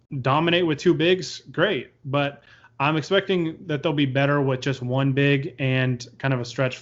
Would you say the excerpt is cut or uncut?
uncut